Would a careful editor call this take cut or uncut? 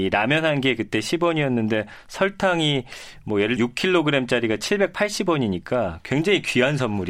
cut